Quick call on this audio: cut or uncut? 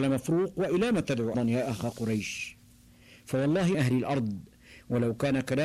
cut